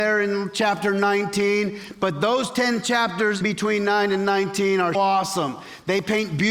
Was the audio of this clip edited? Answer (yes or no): yes